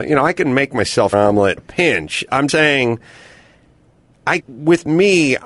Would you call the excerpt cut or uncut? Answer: cut